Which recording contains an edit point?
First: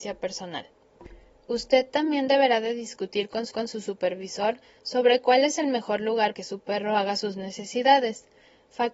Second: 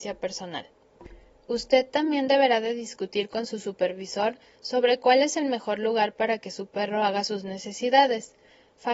first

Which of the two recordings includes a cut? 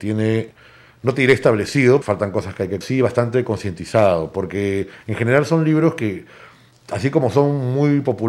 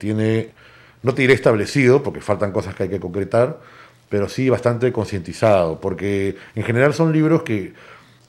first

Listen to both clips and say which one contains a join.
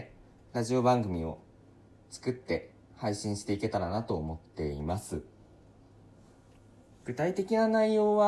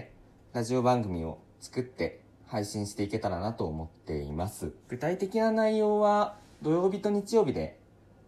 second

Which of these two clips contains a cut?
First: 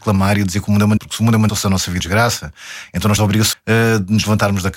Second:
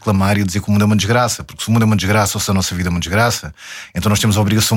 first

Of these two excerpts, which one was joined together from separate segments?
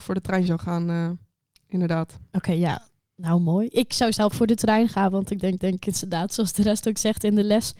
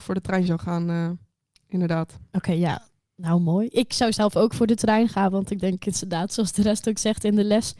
first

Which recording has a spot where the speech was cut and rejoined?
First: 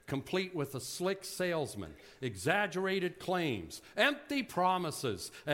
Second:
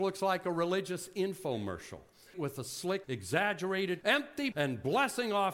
second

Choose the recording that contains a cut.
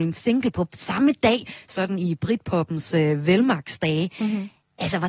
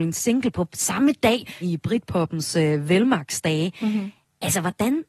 second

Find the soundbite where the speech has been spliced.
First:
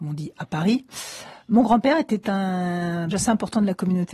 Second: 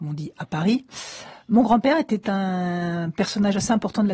first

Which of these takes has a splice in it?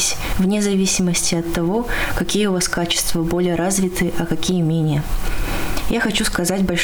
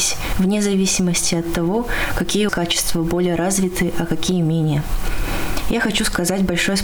second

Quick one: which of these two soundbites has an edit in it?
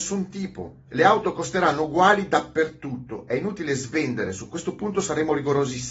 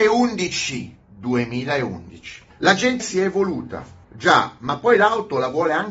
second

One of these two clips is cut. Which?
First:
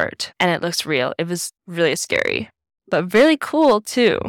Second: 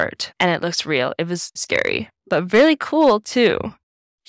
second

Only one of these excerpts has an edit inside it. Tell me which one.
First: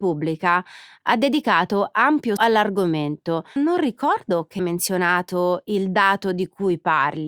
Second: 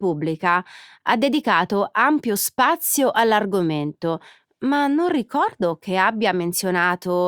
first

